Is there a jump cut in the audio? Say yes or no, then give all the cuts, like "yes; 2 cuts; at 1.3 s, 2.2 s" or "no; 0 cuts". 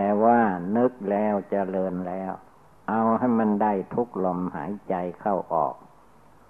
no; 0 cuts